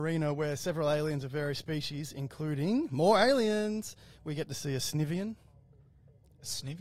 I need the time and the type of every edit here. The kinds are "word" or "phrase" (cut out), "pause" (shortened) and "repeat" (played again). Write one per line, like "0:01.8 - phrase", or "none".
none